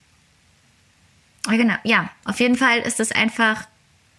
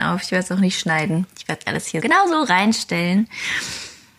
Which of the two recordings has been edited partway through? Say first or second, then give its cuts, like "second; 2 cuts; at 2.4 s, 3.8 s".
second; 2 cuts; at 1.6 s, 2.0 s